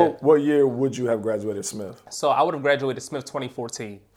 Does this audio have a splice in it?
no; 0 cuts

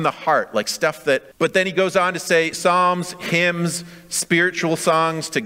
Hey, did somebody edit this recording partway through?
yes; 2 cuts; at 1.3 s, 2.5 s

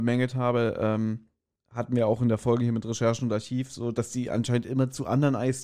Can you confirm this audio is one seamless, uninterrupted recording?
yes; 0 cuts

